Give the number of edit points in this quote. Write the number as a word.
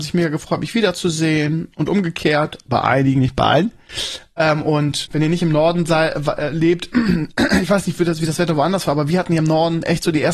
one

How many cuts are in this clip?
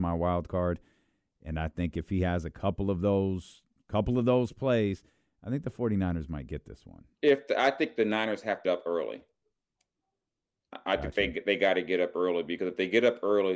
two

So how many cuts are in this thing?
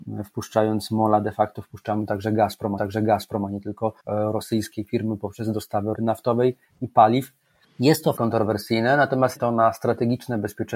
six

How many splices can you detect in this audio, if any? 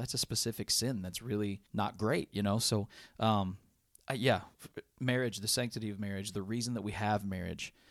one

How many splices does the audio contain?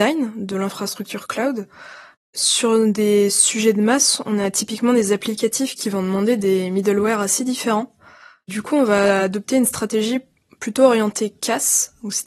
zero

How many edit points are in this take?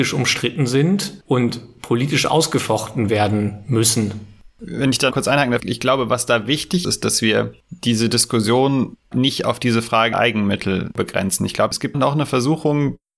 eight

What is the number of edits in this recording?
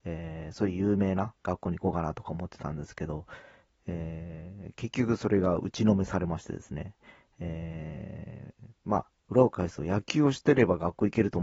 zero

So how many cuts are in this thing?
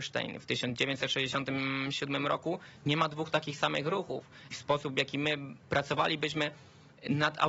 one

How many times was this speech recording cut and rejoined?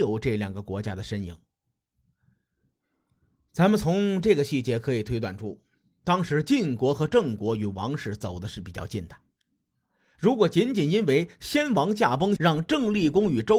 one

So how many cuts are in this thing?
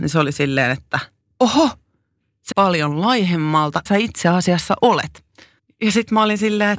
four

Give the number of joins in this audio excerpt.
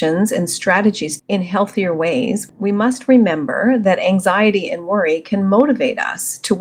one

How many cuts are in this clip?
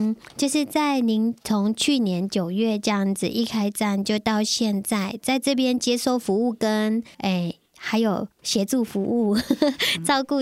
three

